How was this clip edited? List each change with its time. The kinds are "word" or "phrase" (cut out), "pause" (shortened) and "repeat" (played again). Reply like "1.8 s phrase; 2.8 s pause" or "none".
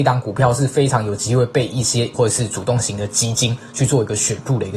2.1 s phrase